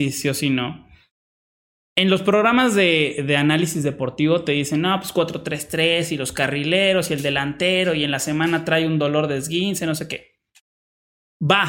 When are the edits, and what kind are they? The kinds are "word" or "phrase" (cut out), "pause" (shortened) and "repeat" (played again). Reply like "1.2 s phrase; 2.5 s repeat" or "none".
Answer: none